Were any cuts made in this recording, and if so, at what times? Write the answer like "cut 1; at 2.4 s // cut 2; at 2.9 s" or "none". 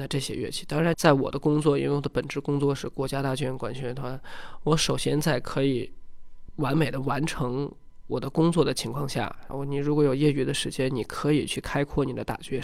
cut 1; at 0.9 s